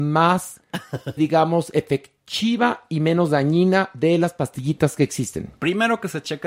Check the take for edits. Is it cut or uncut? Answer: cut